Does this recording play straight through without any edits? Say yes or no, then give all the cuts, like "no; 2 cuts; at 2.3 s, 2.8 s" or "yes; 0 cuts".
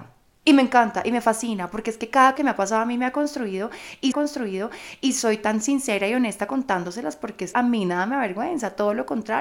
no; 3 cuts; at 2.4 s, 4.1 s, 7.5 s